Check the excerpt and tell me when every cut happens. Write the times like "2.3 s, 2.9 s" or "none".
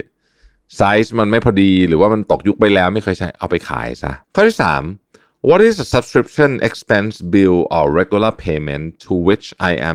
4.2 s